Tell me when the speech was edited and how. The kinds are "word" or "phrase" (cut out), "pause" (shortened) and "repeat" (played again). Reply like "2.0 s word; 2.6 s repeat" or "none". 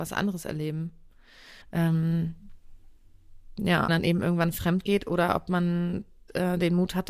1.6 s pause; 3.9 s phrase